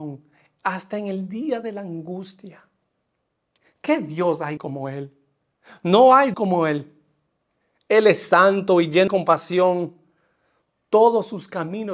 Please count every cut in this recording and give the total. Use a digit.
3